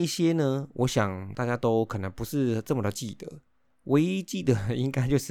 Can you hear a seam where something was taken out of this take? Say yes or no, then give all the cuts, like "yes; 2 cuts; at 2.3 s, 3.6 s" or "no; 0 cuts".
no; 0 cuts